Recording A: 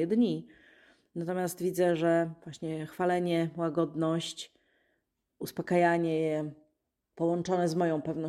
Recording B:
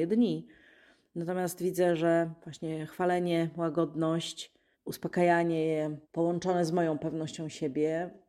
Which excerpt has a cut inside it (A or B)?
B